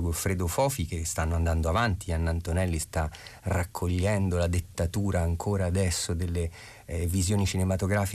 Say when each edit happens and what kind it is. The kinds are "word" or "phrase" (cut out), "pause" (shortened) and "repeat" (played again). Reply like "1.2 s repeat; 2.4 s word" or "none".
none